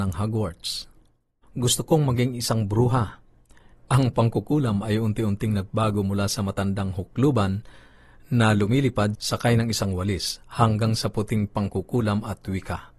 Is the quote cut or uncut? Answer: uncut